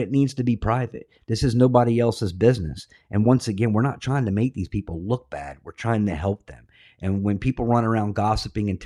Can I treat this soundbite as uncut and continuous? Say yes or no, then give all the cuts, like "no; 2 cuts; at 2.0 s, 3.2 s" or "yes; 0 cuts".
yes; 0 cuts